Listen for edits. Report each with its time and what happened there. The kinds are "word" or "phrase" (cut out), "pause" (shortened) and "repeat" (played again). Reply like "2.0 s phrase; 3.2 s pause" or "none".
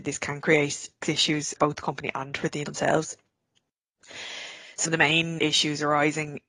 1.0 s word; 1.6 s word; 2.6 s word; 4.8 s word; 5.4 s word